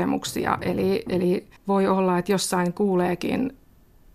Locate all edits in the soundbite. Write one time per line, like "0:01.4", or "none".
0:01.6

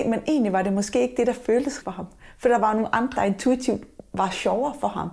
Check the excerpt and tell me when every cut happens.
0:01.8
0:03.2

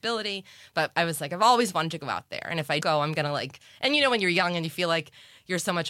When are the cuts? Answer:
0:02.8

